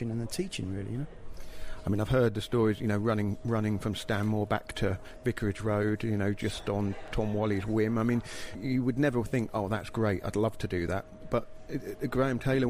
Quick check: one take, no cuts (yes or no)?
yes